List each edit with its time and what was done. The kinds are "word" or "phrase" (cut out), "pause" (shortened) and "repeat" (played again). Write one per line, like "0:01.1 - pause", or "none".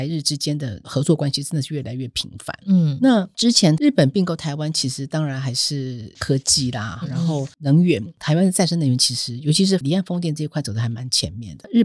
0:07.0 - word